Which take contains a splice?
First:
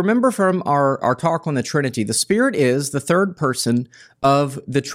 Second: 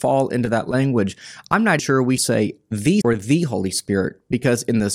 second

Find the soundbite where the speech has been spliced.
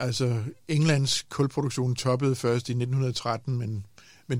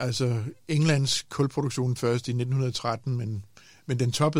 second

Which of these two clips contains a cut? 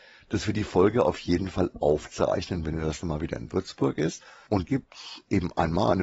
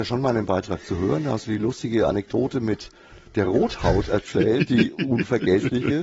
first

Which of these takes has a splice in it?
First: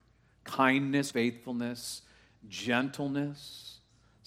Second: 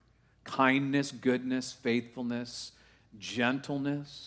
first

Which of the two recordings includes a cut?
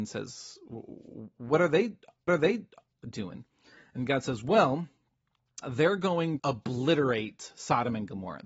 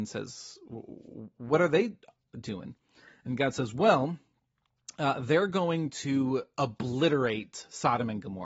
first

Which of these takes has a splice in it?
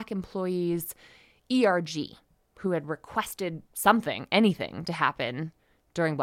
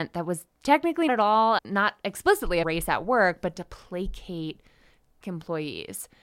second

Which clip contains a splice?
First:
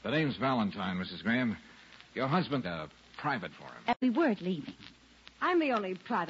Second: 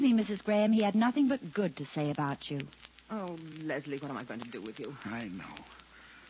first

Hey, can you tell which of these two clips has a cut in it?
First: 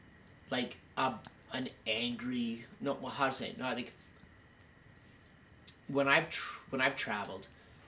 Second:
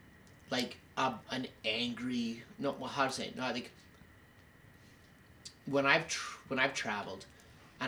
second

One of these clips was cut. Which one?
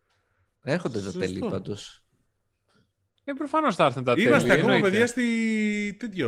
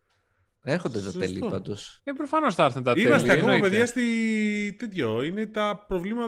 second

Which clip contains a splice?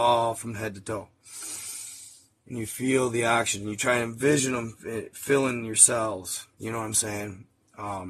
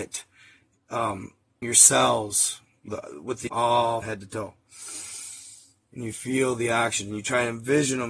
second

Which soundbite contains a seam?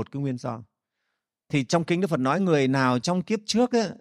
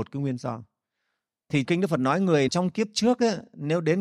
second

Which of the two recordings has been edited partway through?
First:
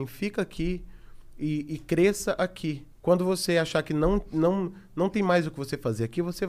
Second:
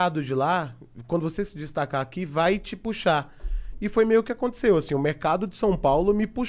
first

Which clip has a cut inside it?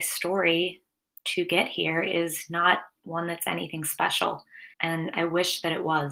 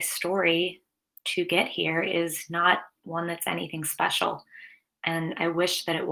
first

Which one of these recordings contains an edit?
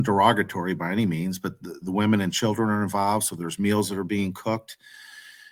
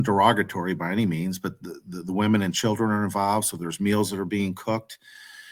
first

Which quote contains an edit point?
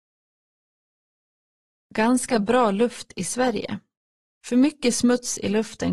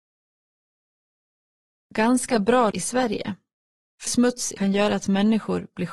second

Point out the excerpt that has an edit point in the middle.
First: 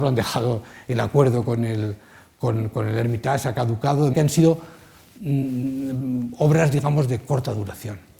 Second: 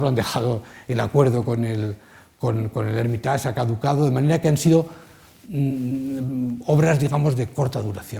first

